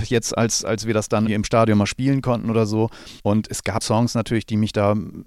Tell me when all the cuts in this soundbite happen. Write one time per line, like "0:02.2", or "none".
0:01.3
0:03.2
0:03.8